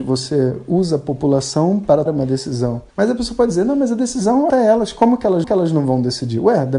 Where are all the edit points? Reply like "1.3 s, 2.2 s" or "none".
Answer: 2.1 s, 2.9 s, 4.5 s, 5.4 s